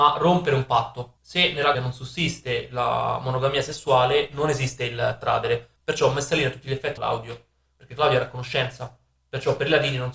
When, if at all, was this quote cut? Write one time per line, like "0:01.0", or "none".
0:01.2
0:01.7
0:05.8
0:07.0